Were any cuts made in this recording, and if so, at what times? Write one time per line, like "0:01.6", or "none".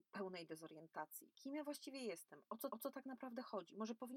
0:01.3
0:02.7